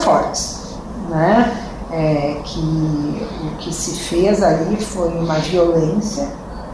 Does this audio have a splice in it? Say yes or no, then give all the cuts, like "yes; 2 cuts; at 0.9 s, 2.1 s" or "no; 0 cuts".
no; 0 cuts